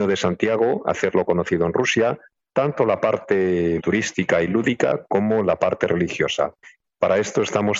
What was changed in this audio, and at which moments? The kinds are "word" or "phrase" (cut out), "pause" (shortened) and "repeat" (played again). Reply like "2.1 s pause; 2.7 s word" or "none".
none

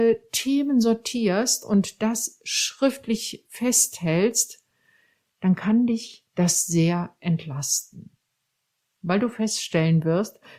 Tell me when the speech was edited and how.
none

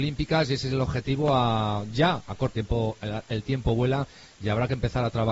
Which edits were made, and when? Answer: 2.5 s phrase

